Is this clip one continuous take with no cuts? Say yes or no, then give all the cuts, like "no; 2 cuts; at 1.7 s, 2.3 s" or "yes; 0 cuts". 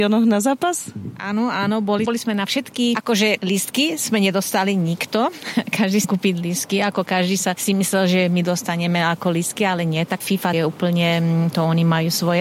no; 4 cuts; at 2.1 s, 6.0 s, 10.2 s, 10.5 s